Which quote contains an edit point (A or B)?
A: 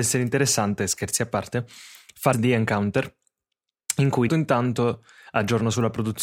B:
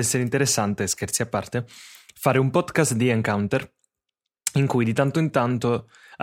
A